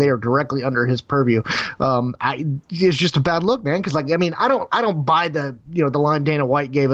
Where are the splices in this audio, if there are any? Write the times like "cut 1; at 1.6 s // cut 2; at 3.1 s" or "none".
cut 1; at 2.6 s // cut 2; at 5.6 s